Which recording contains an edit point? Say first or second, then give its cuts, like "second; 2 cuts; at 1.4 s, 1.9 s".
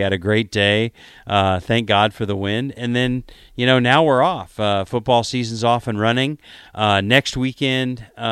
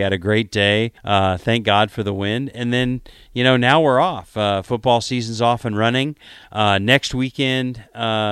second; 1 cut; at 1.0 s